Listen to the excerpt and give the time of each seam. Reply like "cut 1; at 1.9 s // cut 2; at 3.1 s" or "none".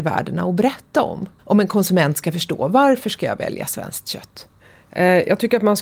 cut 1; at 1.4 s